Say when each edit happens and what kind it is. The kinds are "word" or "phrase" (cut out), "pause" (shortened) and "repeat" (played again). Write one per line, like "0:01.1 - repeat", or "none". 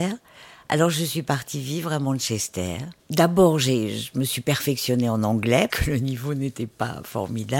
0:03.0 - pause
0:05.7 - word